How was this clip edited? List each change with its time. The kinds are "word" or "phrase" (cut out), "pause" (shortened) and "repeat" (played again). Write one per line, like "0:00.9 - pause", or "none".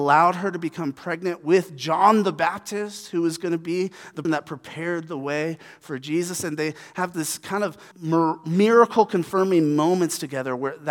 0:04.2 - word
0:07.1 - word
0:07.9 - word

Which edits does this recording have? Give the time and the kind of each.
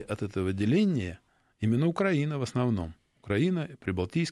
none

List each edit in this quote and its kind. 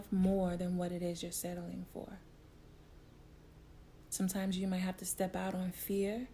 none

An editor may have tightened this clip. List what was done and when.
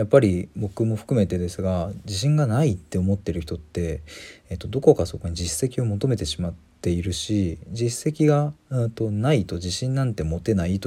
0:08.6 - pause

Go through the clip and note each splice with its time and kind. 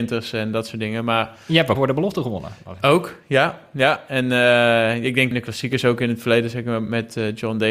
0:01.8 - word
0:05.3 - word

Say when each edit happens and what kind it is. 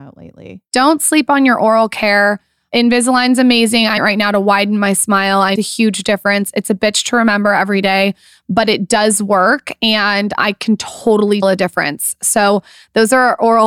0:04.0 - word
0:05.6 - word
0:11.4 - word

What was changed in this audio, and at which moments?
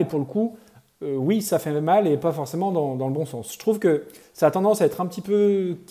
none

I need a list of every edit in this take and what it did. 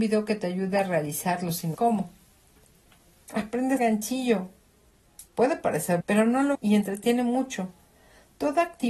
0:01.7 - word
0:03.8 - word
0:05.3 - pause
0:06.0 - word
0:06.5 - word

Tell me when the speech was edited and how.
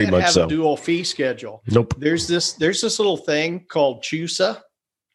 none

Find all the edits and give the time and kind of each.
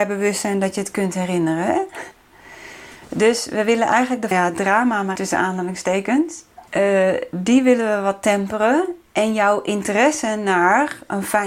0:04.3 - phrase
0:05.1 - word
0:06.7 - pause

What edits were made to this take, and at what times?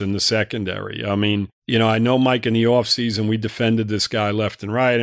0:01.6 - pause

